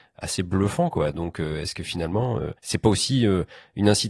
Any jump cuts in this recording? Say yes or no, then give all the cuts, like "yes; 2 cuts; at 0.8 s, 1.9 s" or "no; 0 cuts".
yes; 1 cut; at 2.6 s